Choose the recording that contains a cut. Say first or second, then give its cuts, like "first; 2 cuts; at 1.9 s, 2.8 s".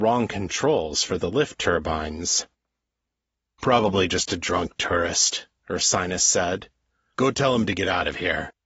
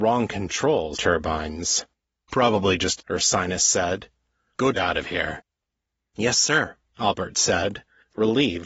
second; 4 cuts; at 0.9 s, 2.0 s, 3.0 s, 4.7 s